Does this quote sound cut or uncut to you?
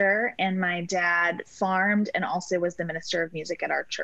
uncut